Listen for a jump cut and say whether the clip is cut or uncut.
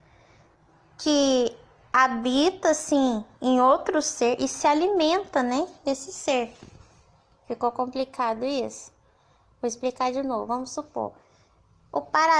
uncut